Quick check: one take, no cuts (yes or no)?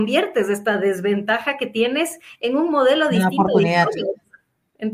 yes